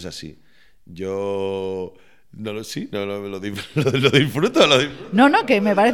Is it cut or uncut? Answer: uncut